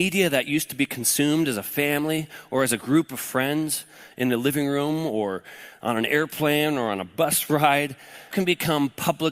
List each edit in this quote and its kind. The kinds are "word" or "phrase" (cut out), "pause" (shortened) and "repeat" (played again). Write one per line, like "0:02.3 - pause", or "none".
0:08.3 - word